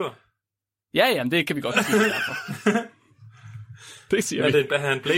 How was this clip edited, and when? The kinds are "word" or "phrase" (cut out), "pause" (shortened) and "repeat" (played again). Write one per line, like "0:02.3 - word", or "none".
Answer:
none

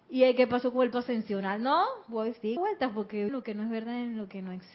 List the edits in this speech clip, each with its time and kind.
0:00.9 - word
0:02.6 - word
0:03.3 - phrase

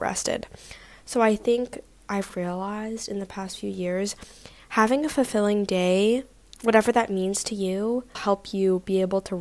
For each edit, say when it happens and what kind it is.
0:02.3 - word
0:08.1 - word

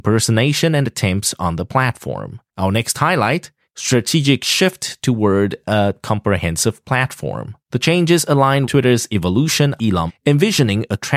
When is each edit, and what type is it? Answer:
0:02.5 - pause
0:03.6 - pause
0:07.6 - pause
0:08.6 - word
0:09.8 - word
0:10.1 - word

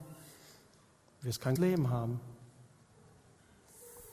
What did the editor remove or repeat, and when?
0:01.6 - word

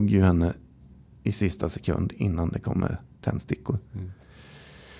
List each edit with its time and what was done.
0:03.8 - pause

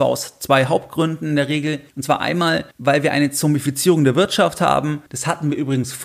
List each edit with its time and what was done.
0:01.9 - pause
0:02.7 - pause
0:05.1 - pause

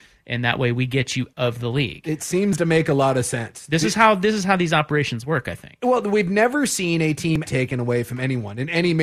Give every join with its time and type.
0:01.3 - word
0:07.5 - word

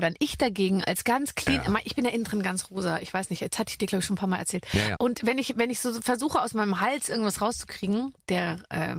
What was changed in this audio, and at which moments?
0:05.0 - word

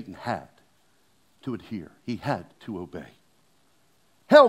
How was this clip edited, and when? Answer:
0:02.5 - pause

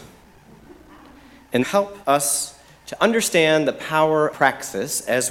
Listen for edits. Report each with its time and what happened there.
0:01.6 - phrase
0:02.0 - pause
0:04.3 - word

